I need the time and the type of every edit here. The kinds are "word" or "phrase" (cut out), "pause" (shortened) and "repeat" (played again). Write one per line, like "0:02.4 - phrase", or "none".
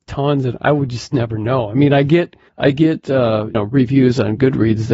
0:02.5 - pause
0:03.5 - word